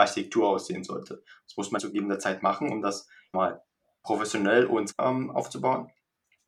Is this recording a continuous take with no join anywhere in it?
no; 3 cuts; at 1.8 s, 3.3 s, 4.9 s

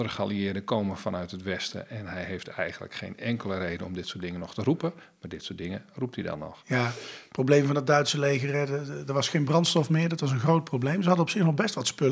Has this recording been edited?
no; 0 cuts

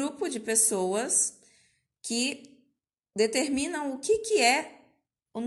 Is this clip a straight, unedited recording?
yes; 0 cuts

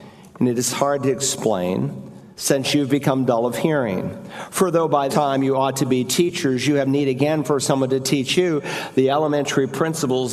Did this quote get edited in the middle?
yes; 2 cuts; at 2.3 s, 5.1 s

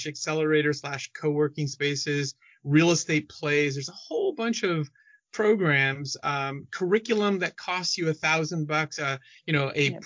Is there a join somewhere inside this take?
no; 0 cuts

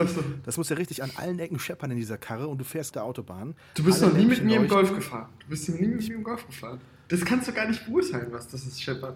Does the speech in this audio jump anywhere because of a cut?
yes; 1 cut; at 2.9 s

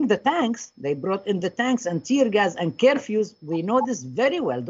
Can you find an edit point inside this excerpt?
no; 0 cuts

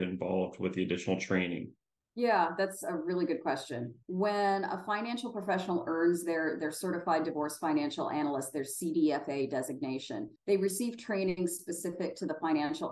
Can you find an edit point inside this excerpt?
yes; 1 cut; at 10.4 s

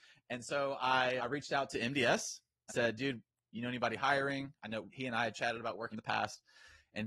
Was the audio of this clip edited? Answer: yes; 4 cuts; at 1.2 s, 2.7 s, 4.9 s, 5.9 s

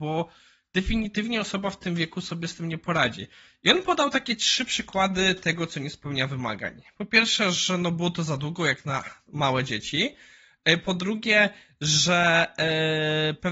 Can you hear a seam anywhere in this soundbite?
no; 0 cuts

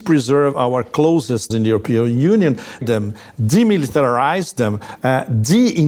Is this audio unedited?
no; 2 cuts; at 1.5 s, 2.8 s

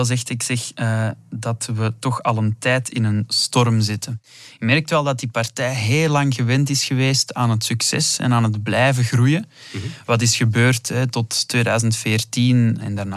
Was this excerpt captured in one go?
yes; 0 cuts

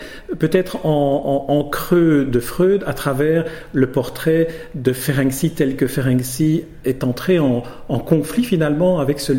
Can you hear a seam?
no; 0 cuts

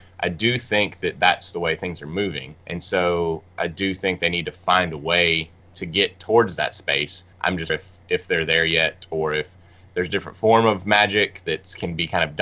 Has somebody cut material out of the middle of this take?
yes; 4 cuts; at 2.6 s, 5.6 s, 7.3 s, 7.7 s

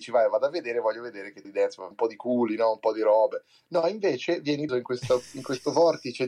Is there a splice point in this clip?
yes; 3 cuts; at 1.4 s, 1.9 s, 4.7 s

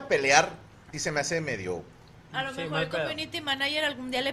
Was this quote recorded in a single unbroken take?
no; 1 cut; at 0.9 s

